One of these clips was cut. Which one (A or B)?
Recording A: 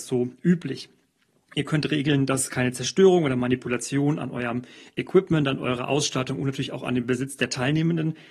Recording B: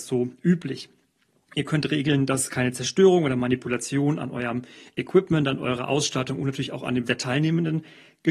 B